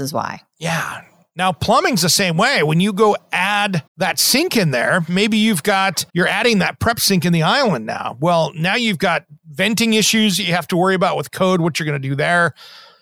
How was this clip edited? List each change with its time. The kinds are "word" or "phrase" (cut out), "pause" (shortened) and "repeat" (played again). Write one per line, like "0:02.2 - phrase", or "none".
0:03.9 - pause
0:06.1 - pause